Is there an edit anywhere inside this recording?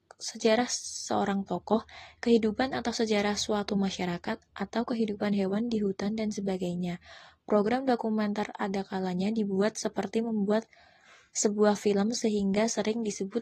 no; 0 cuts

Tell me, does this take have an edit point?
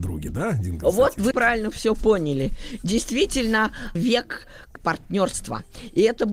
yes; 3 cuts; at 1.3 s, 3.9 s, 4.7 s

